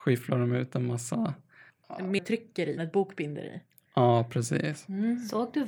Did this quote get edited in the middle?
yes; 2 cuts; at 2.2 s, 2.8 s

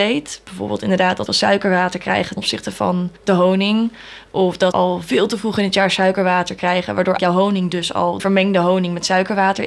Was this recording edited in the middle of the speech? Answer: yes; 6 cuts; at 1.3 s, 2.4 s, 3.2 s, 4.7 s, 7.2 s, 8.2 s

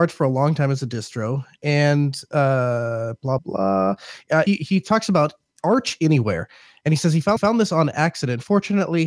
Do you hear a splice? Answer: yes; 3 cuts; at 3.4 s, 4.5 s, 7.4 s

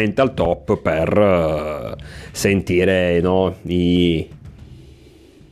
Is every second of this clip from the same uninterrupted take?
yes; 0 cuts

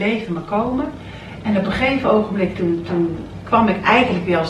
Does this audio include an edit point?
no; 0 cuts

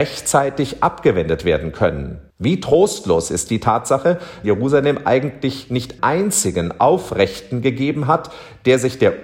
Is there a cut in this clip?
yes; 3 cuts; at 2.3 s, 4.4 s, 6.0 s

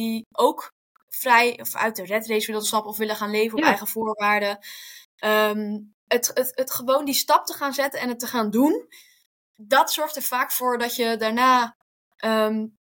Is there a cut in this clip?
no; 0 cuts

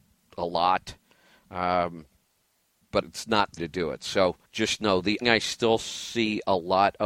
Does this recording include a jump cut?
yes; 4 cuts; at 3.0 s, 3.6 s, 4.4 s, 5.2 s

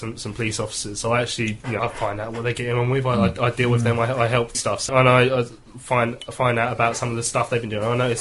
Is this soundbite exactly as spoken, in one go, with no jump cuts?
no; 3 cuts; at 1.8 s, 4.5 s, 4.9 s

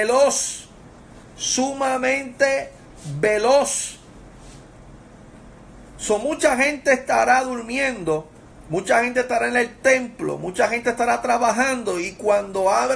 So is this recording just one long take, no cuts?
yes; 0 cuts

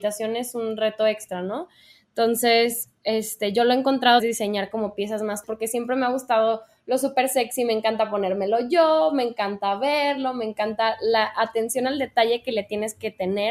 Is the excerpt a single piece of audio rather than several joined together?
no; 2 cuts; at 4.2 s, 5.4 s

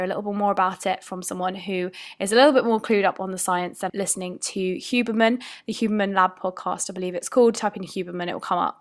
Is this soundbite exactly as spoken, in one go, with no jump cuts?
no; 1 cut; at 3.9 s

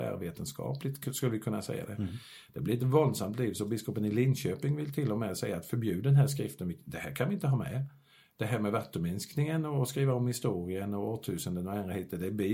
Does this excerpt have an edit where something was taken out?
no; 0 cuts

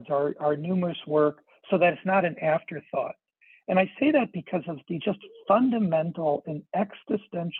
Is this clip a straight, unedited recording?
yes; 0 cuts

